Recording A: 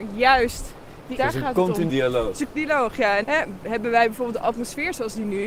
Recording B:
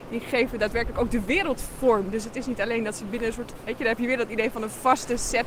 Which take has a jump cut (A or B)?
A